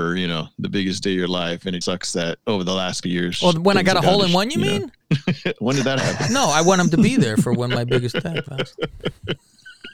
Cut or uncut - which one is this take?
cut